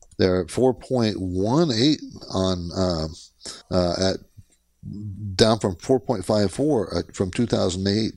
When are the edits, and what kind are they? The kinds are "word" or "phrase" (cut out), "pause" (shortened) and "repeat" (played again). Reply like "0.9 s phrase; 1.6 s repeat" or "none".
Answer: 3.6 s pause